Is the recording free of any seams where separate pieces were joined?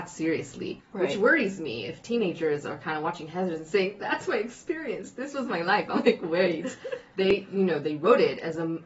yes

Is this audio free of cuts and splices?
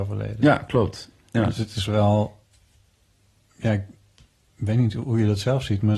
yes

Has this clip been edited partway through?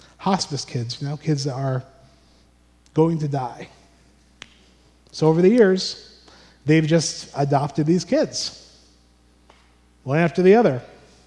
no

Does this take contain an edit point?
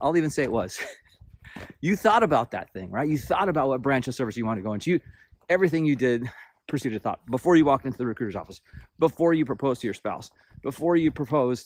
no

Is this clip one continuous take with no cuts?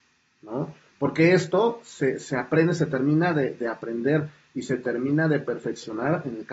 yes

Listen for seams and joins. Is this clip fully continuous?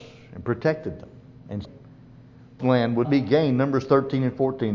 no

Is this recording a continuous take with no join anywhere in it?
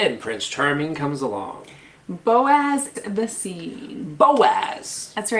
no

